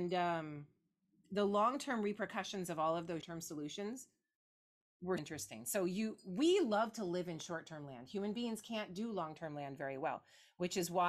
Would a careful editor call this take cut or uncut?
cut